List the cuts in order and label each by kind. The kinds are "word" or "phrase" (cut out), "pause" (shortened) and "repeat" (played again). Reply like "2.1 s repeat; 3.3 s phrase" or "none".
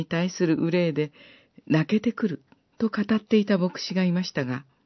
2.6 s pause